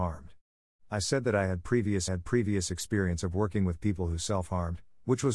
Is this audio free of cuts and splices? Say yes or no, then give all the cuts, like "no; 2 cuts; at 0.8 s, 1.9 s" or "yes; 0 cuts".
no; 1 cut; at 2.1 s